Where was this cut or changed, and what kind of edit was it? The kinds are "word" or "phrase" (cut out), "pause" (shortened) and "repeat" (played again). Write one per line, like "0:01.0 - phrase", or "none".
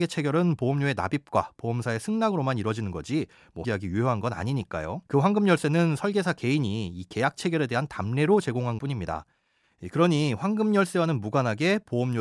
0:03.6 - phrase
0:05.1 - pause
0:08.8 - word